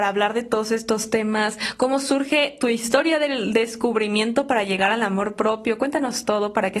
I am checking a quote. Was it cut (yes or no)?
no